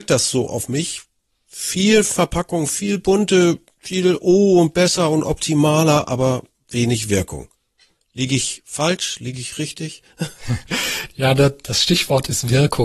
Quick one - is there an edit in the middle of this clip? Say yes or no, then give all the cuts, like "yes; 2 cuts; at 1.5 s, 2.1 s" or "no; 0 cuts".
no; 0 cuts